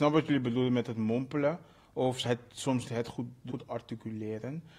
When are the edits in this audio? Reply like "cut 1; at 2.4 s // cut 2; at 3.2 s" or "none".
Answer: cut 1; at 2.2 s // cut 2; at 2.8 s // cut 3; at 3.5 s